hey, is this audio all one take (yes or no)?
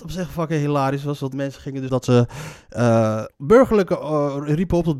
no